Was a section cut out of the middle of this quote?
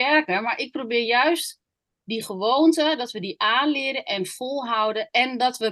no; 0 cuts

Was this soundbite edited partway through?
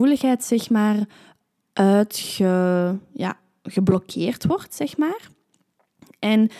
no; 0 cuts

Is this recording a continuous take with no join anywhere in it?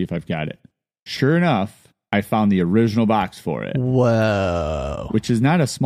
yes; 0 cuts

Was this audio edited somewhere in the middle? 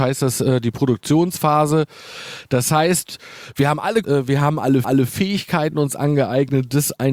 yes; 2 cuts; at 4.0 s, 4.8 s

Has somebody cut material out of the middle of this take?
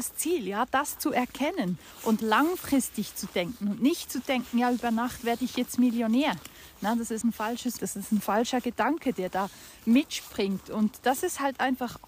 yes; 3 cuts; at 2.2 s, 7.2 s, 7.8 s

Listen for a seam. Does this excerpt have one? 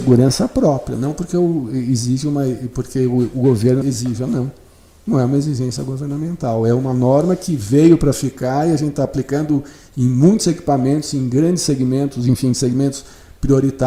yes; 1 cut; at 3.8 s

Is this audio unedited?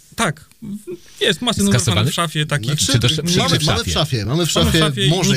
yes; 0 cuts

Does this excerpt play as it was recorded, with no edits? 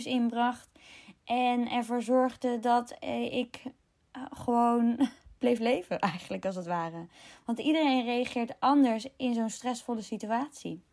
yes; 0 cuts

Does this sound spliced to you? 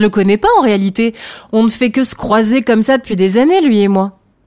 no; 0 cuts

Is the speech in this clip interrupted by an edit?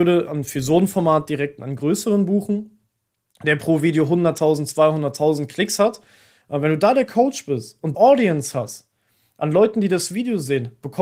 yes; 1 cut; at 7.9 s

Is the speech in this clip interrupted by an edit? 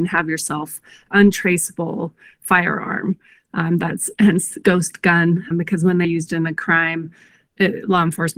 yes; 5 cuts; at 1.1 s, 4.6 s, 5.5 s, 6.0 s, 7.5 s

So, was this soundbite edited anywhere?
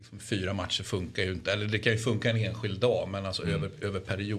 no; 0 cuts

